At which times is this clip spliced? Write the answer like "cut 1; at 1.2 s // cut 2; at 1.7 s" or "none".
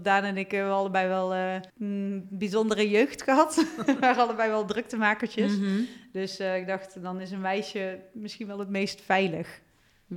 cut 1; at 1.7 s